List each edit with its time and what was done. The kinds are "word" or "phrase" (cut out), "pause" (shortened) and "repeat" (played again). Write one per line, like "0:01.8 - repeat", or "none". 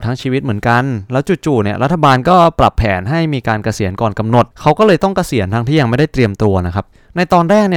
0:04.5 - pause